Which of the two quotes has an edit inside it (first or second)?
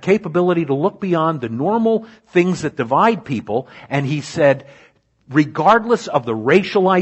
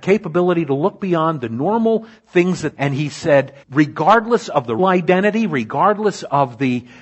second